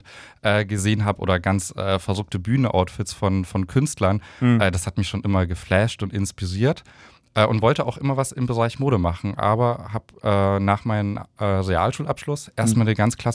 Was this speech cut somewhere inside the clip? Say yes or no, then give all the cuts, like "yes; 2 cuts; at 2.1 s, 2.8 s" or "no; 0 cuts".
no; 0 cuts